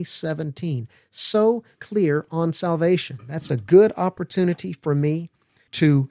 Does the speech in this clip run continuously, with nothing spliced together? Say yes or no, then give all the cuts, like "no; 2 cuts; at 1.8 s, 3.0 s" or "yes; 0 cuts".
no; 2 cuts; at 1.7 s, 3.5 s